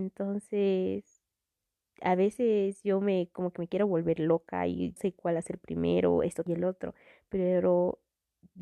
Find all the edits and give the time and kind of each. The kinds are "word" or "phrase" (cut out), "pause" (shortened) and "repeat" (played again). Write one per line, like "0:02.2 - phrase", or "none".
0:05.0 - word
0:06.5 - word